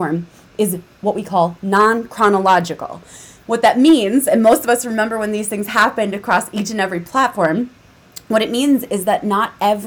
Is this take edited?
no; 0 cuts

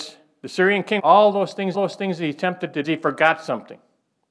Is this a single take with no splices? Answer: no; 3 cuts; at 1.0 s, 1.7 s, 2.8 s

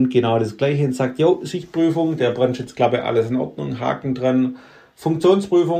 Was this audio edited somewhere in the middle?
no; 0 cuts

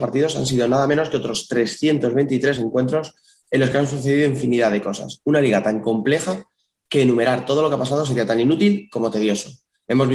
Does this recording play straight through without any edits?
yes; 0 cuts

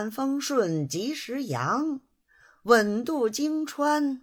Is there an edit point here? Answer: no; 0 cuts

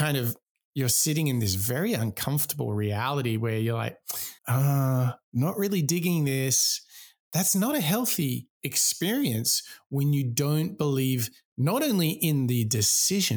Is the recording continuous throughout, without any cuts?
no; 1 cut; at 4.4 s

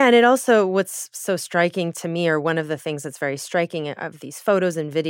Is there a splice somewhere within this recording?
no; 0 cuts

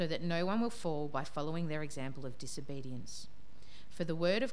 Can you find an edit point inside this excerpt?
no; 0 cuts

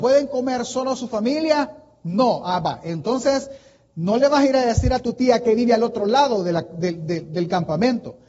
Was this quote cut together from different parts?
no; 0 cuts

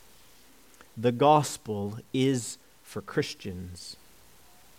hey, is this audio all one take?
yes; 0 cuts

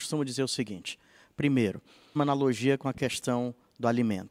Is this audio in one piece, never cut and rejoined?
no; 1 cut; at 2.2 s

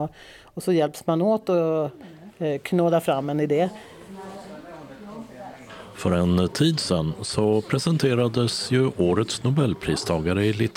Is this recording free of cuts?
yes; 0 cuts

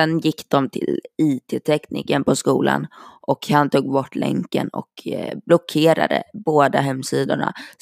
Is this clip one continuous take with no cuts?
yes; 0 cuts

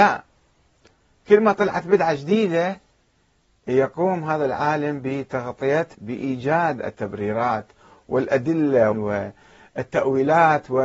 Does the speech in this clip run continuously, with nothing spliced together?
no; 2 cuts; at 5.9 s, 8.9 s

